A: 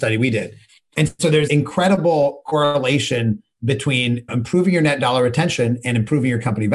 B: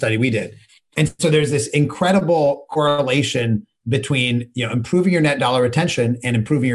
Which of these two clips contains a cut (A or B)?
A